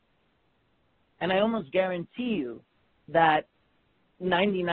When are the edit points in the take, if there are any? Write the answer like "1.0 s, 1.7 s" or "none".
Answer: none